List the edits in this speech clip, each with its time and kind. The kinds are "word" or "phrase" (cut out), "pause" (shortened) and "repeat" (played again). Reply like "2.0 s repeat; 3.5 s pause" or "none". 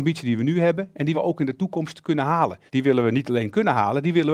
1.1 s word; 2.7 s pause

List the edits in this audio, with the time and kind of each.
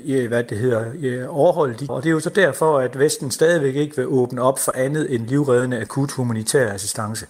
1.9 s word

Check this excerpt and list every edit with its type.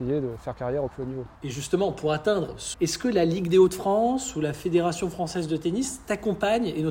1.3 s pause; 2.7 s phrase

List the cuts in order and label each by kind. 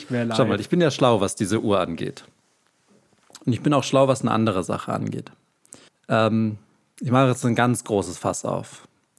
5.9 s pause

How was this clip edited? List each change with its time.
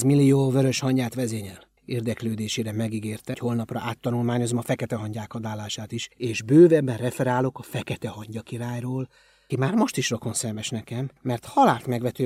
1.8 s pause; 3.3 s word; 6.1 s pause; 9.5 s word; 11.2 s pause

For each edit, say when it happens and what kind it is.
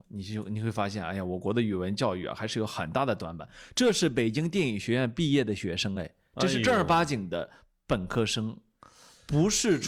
none

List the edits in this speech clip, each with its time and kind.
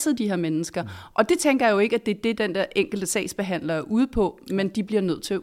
none

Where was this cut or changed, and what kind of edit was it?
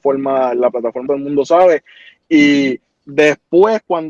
1.1 s word

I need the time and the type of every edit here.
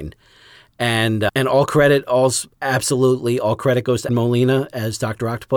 2.5 s pause; 4.1 s word

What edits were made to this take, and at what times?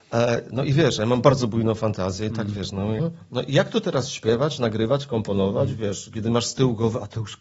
3.0 s word

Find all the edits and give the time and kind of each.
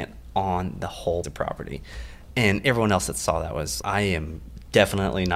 1.2 s word; 3.8 s word

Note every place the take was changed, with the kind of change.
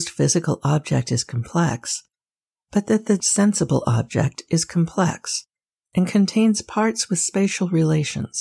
3.2 s word

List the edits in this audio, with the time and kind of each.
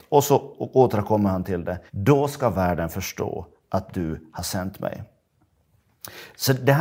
1.9 s pause

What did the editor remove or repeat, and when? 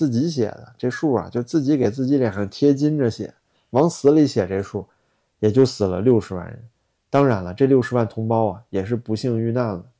none

